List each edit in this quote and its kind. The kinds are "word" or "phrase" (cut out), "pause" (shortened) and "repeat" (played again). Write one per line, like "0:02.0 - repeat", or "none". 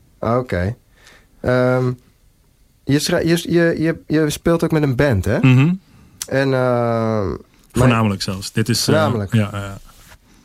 none